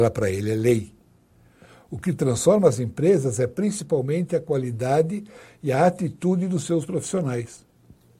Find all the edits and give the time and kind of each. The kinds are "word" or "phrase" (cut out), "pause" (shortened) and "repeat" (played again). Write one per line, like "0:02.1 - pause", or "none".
none